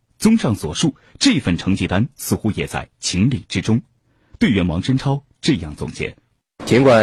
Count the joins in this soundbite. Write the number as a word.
zero